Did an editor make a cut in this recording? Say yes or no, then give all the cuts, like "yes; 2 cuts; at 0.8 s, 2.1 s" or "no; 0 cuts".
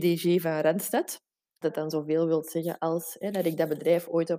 yes; 1 cut; at 1.6 s